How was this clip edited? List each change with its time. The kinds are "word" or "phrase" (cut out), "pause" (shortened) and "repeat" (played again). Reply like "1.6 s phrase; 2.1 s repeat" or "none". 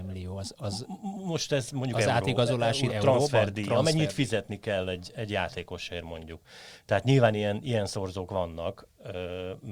2.9 s word